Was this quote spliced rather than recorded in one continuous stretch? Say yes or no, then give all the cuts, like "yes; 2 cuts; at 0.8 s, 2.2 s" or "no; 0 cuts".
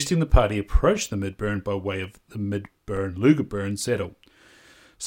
no; 0 cuts